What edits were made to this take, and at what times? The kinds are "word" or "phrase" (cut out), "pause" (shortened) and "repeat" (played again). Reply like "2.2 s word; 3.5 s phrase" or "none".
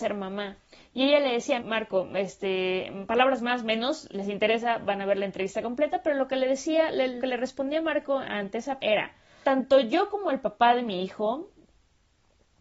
1.6 s word; 4.1 s word; 7.2 s word; 8.8 s word; 9.4 s word